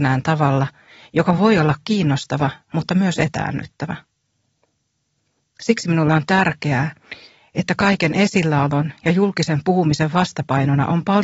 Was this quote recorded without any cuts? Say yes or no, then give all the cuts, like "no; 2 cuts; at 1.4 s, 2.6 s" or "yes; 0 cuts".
yes; 0 cuts